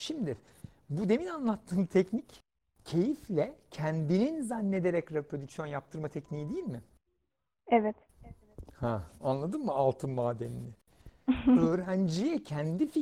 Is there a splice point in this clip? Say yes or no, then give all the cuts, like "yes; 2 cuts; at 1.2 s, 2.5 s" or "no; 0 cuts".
no; 0 cuts